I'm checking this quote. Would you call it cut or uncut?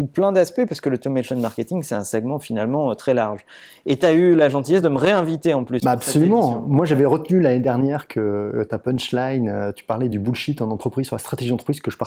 uncut